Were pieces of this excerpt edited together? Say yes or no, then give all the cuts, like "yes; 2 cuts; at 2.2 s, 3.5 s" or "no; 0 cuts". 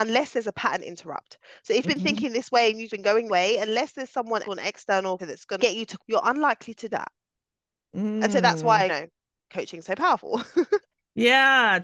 yes; 9 cuts; at 1.8 s, 2.9 s, 3.3 s, 4.4 s, 5.2 s, 5.6 s, 6.0 s, 6.9 s, 8.9 s